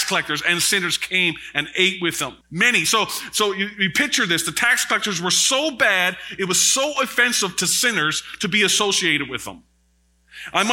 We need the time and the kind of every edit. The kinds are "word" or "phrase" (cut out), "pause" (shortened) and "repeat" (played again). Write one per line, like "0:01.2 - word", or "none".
0:02.4 - pause

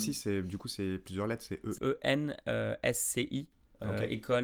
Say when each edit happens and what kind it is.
0:01.8 - word

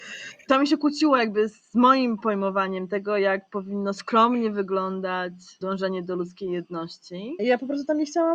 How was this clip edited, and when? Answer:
none

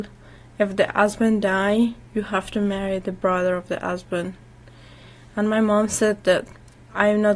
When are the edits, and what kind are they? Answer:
none

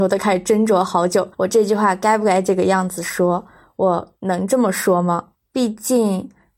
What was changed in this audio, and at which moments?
0:01.3 - pause
0:04.2 - pause
0:05.3 - pause

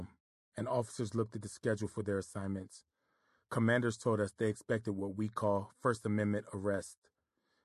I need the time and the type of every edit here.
none

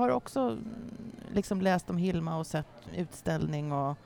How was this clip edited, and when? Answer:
none

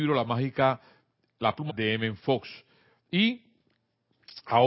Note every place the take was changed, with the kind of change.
0:01.7 - word

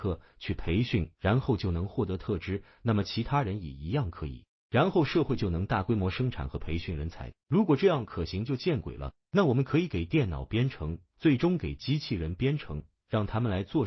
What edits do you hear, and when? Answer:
0:01.1 - pause
0:07.4 - pause
0:09.2 - pause

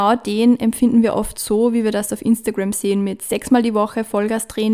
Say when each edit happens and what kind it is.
none

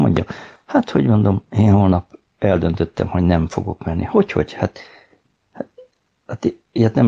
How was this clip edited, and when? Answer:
none

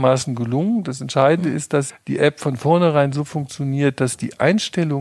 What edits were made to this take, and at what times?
0:01.9 - word

